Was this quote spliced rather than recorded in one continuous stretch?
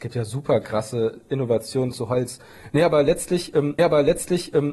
yes; 1 cut; at 3.8 s

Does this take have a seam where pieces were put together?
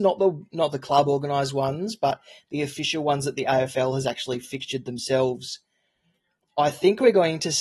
no; 0 cuts

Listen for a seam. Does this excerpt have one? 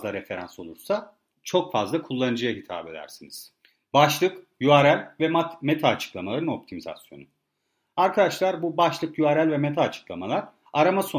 no; 0 cuts

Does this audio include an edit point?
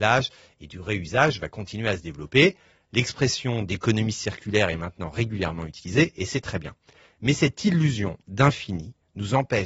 no; 0 cuts

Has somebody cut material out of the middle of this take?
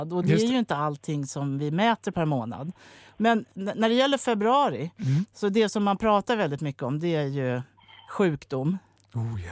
no; 0 cuts

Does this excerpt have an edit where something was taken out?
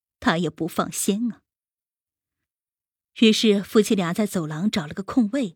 no; 0 cuts

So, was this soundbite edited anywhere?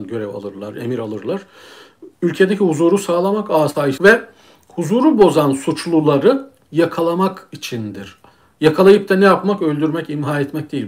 yes; 2 cuts; at 2.1 s, 4.0 s

